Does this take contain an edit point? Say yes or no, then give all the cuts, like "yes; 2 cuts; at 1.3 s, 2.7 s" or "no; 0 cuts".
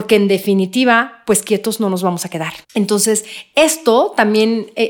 yes; 1 cut; at 2.6 s